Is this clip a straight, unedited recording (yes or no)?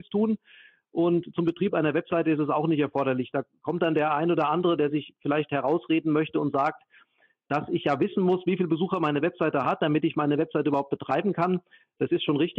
yes